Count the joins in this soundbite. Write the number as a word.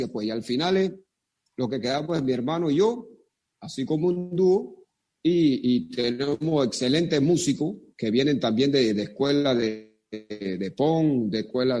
zero